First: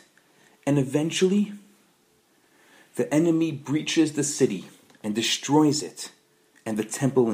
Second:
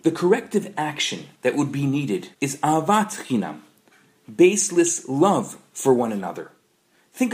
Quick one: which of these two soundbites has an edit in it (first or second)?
second